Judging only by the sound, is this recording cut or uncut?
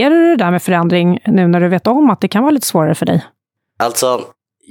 uncut